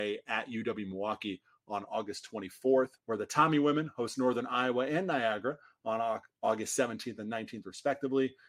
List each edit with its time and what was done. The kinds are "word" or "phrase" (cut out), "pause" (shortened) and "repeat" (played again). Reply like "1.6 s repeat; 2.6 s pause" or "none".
3.0 s pause